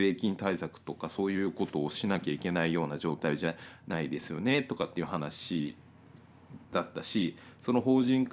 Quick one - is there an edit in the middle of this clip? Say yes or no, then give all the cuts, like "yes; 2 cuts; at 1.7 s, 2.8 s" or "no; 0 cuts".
yes; 1 cut; at 6.6 s